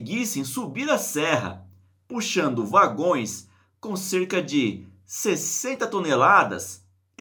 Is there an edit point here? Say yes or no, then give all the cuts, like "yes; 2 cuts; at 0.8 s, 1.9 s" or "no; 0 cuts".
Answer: no; 0 cuts